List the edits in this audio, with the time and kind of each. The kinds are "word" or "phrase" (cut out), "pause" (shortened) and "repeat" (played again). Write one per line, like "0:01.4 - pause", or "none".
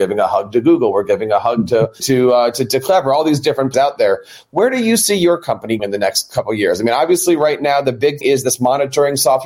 0:02.0 - word
0:03.7 - word
0:05.8 - word
0:08.2 - word